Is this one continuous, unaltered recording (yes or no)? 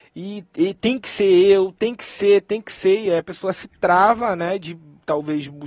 yes